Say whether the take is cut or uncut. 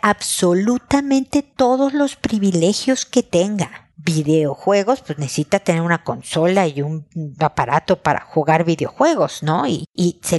uncut